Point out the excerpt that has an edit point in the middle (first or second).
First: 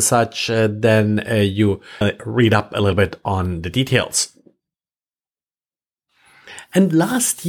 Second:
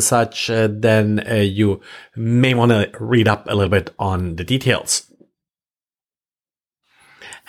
first